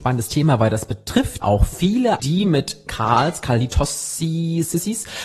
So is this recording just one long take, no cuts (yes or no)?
no